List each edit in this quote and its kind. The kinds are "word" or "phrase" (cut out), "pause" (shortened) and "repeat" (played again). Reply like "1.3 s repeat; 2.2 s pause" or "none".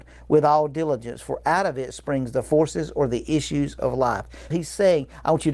4.5 s word